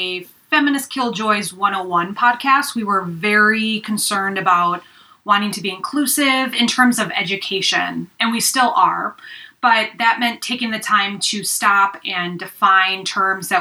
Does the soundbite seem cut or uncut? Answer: uncut